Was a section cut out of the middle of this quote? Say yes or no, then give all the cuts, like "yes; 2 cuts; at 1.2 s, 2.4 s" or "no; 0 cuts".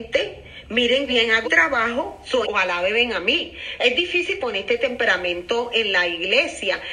yes; 4 cuts; at 1.1 s, 1.4 s, 2.4 s, 4.4 s